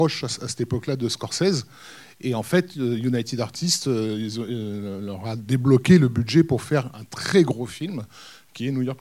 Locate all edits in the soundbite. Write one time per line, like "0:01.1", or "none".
none